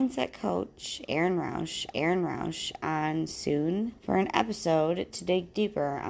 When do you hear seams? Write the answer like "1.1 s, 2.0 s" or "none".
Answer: 1.9 s, 4.0 s